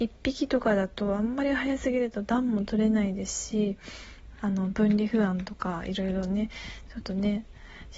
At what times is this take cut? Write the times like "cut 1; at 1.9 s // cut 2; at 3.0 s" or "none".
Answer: cut 1; at 4.4 s